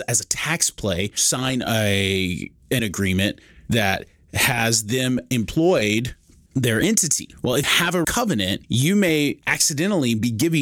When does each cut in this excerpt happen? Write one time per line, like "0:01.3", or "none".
0:02.8
0:06.5
0:07.6
0:08.0
0:08.6